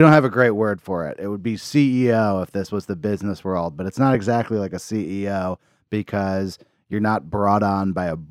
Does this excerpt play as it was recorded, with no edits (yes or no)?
yes